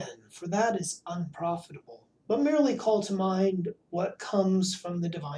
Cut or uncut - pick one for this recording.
uncut